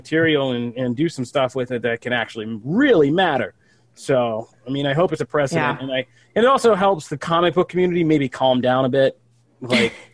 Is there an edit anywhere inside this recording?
yes; 1 cut; at 5.2 s

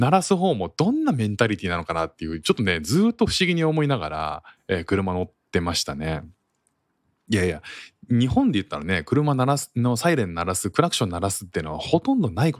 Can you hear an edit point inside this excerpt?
no; 0 cuts

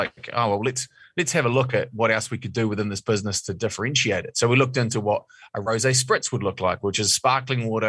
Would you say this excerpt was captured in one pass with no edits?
yes; 0 cuts

